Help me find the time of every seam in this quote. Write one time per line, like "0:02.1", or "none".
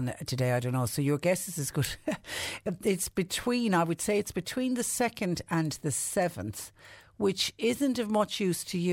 none